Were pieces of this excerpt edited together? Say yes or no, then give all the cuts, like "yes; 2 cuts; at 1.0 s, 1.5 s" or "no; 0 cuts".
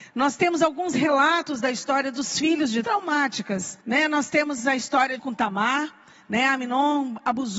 yes; 3 cuts; at 2.8 s, 3.8 s, 5.2 s